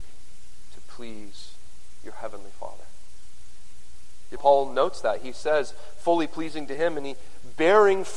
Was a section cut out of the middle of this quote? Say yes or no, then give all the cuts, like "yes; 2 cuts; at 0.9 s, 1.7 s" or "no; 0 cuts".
yes; 1 cut; at 4.4 s